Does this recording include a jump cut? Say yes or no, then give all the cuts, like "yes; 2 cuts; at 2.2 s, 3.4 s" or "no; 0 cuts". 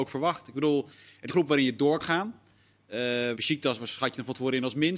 yes; 3 cuts; at 1.3 s, 2.0 s, 3.4 s